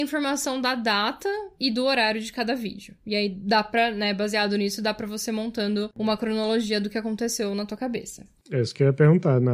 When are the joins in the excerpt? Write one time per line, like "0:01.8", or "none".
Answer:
0:03.0